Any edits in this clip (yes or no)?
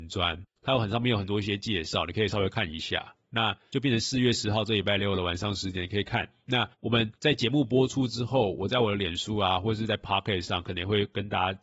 yes